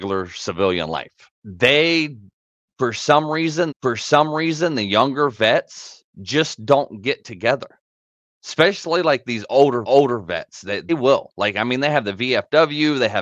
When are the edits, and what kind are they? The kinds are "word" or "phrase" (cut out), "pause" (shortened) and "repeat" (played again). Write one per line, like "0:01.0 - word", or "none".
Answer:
0:01.3 - pause
0:03.7 - repeat
0:06.1 - pause
0:07.9 - pause
0:09.8 - repeat
0:10.9 - word